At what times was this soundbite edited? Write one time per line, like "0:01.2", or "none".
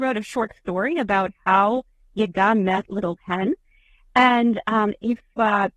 none